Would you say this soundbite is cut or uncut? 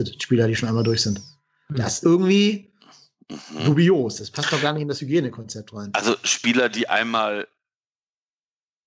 cut